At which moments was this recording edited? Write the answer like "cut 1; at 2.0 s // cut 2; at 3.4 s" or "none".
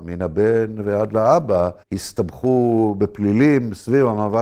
cut 1; at 1.8 s

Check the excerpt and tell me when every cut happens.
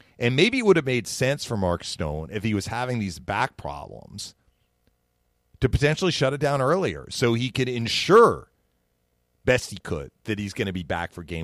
none

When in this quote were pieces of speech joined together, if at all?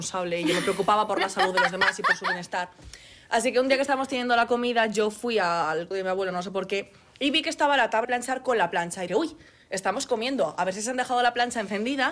cut 1; at 5.9 s // cut 2; at 8.0 s // cut 3; at 9.1 s

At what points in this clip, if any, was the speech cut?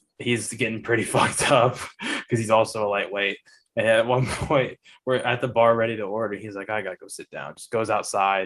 none

